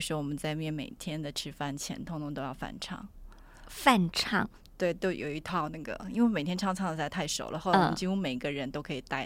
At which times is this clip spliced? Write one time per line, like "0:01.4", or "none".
none